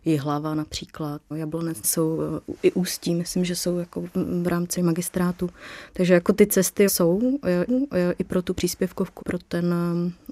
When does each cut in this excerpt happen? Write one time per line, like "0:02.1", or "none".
0:01.3
0:01.8
0:04.8
0:06.9
0:07.7
0:09.2